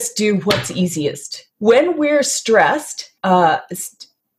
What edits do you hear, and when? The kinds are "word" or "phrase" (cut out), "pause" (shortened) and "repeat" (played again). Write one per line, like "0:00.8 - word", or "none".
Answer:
0:01.5 - pause
0:03.2 - pause